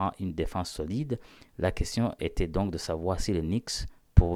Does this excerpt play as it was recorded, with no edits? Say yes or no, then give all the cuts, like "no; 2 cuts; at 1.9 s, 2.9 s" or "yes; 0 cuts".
yes; 0 cuts